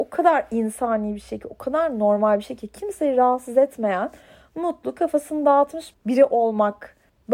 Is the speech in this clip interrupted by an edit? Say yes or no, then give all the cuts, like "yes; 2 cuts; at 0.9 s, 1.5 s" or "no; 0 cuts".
no; 0 cuts